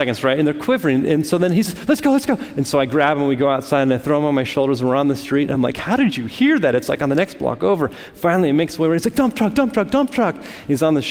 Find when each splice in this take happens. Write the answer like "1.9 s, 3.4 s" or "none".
none